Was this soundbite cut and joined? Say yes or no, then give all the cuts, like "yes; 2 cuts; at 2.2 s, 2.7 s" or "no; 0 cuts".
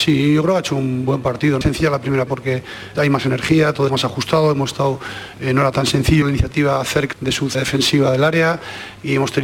yes; 8 cuts; at 1.6 s, 2.3 s, 2.9 s, 3.9 s, 5.7 s, 6.2 s, 7.1 s, 7.5 s